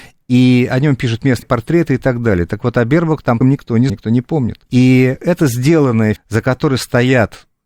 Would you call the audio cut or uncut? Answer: cut